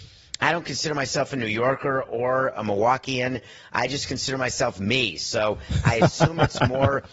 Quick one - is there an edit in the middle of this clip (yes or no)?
no